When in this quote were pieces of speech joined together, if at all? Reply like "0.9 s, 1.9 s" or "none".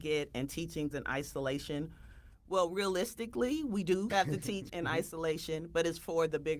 0.9 s, 4.1 s, 4.7 s